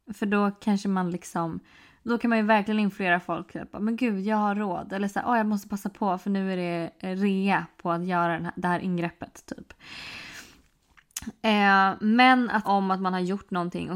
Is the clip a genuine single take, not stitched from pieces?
no; 2 cuts; at 2.1 s, 12.6 s

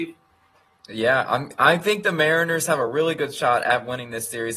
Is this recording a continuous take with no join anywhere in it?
yes; 0 cuts

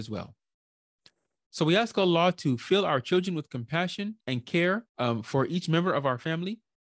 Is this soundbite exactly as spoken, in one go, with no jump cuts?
no; 2 cuts; at 4.2 s, 4.9 s

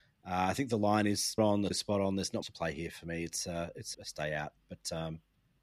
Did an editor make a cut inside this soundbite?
yes; 4 cuts; at 1.4 s, 1.7 s, 2.4 s, 3.9 s

